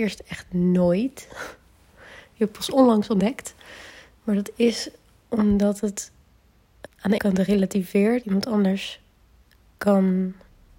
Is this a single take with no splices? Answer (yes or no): no